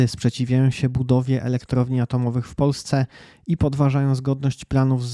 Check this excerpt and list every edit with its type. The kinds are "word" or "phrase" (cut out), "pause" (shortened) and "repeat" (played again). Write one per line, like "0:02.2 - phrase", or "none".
none